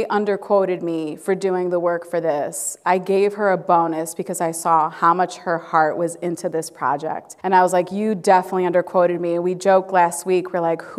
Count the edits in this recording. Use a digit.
1